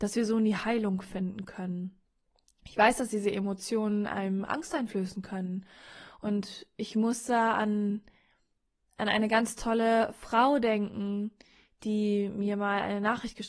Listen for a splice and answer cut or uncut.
uncut